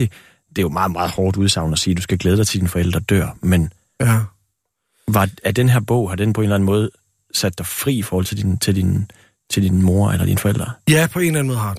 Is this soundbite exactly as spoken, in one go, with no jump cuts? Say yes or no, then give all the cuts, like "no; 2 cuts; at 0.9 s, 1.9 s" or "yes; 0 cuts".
yes; 0 cuts